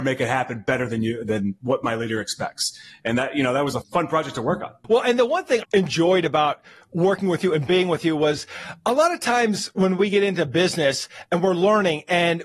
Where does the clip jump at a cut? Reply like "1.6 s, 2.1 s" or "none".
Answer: 3.8 s, 5.6 s